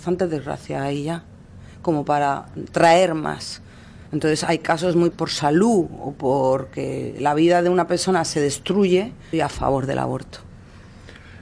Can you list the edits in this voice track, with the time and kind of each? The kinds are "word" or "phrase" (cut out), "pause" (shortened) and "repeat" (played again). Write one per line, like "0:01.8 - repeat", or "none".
0:04.1 - pause
0:05.1 - word
0:09.3 - phrase